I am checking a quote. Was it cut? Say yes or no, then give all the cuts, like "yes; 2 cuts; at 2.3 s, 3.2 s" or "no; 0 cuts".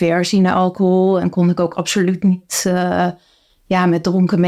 no; 0 cuts